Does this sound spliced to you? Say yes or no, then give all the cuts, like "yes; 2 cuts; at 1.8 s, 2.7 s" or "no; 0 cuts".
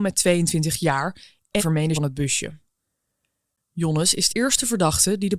yes; 3 cuts; at 1.6 s, 1.9 s, 4.3 s